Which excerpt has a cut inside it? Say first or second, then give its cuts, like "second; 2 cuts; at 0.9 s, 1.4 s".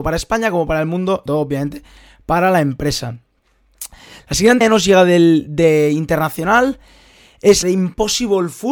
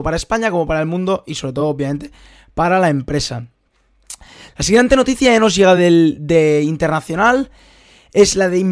first; 3 cuts; at 1.3 s, 4.6 s, 7.6 s